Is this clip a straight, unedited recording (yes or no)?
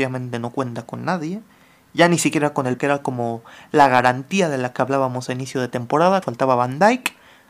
no